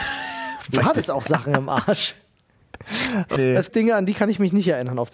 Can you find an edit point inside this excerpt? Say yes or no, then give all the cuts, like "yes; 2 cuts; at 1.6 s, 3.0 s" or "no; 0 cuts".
yes; 2 cuts; at 3.4 s, 3.7 s